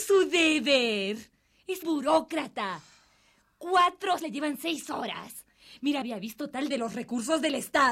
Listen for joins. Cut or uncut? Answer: cut